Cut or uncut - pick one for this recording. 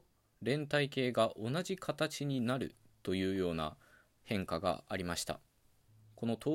uncut